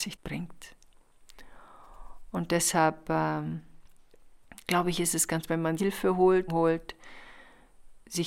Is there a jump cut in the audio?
yes; 3 cuts; at 5.5 s, 5.8 s, 6.5 s

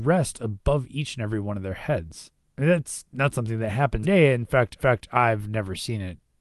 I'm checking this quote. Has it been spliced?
yes; 2 cuts; at 4.0 s, 4.8 s

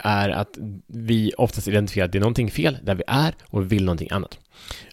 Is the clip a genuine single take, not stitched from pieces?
yes; 0 cuts

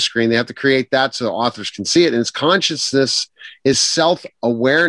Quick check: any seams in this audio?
no; 0 cuts

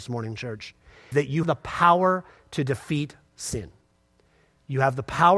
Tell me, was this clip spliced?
yes; 2 cuts; at 1.1 s, 1.4 s

